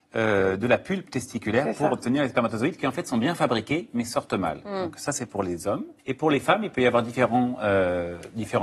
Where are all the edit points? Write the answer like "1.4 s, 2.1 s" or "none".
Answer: 6.0 s